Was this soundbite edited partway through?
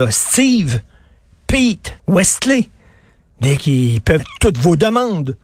yes; 3 cuts; at 2.0 s, 3.6 s, 4.2 s

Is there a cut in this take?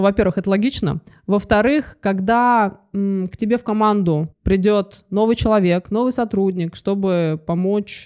yes; 1 cut; at 4.3 s

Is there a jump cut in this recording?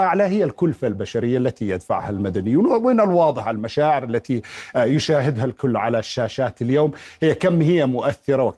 no; 0 cuts

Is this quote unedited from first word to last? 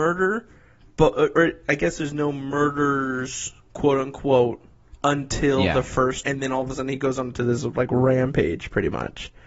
no; 1 cut; at 6.2 s

